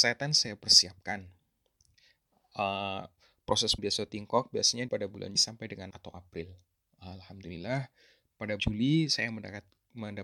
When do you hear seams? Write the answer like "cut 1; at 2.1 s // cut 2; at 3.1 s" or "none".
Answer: cut 1; at 3.8 s // cut 2; at 4.9 s // cut 3; at 5.4 s // cut 4; at 5.9 s // cut 5; at 8.6 s